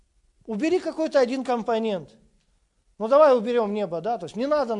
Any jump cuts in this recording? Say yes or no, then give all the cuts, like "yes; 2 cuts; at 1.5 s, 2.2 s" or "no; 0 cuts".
no; 0 cuts